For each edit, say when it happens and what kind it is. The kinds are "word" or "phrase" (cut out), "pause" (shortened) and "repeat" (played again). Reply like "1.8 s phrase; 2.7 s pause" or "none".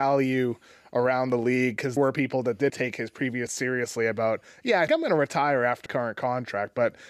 2.0 s word; 2.7 s word; 3.5 s word; 4.9 s word; 5.9 s word